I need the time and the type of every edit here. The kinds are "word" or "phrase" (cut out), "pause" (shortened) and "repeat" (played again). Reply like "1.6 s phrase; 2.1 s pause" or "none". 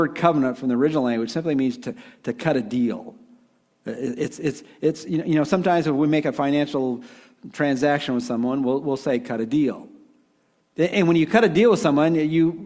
none